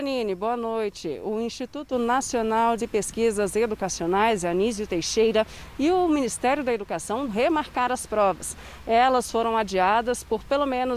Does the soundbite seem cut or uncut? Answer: cut